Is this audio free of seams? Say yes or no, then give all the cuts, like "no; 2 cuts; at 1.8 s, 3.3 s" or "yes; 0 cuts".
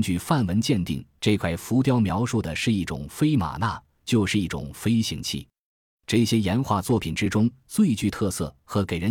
yes; 0 cuts